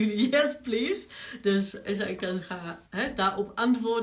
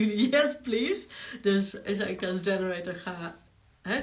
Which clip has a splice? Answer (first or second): first